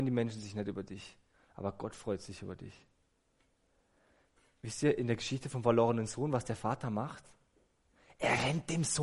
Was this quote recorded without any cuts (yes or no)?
yes